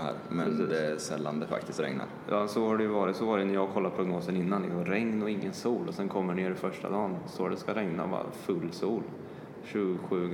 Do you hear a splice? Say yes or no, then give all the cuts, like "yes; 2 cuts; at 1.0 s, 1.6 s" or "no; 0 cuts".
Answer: no; 0 cuts